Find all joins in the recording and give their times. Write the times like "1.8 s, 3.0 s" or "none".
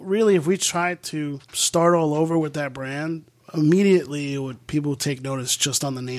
1.4 s